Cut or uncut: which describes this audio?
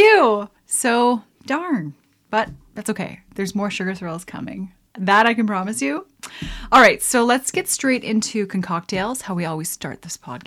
uncut